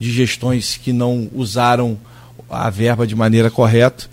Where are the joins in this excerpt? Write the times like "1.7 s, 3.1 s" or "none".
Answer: none